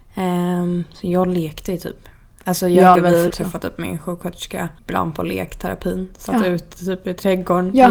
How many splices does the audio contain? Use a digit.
3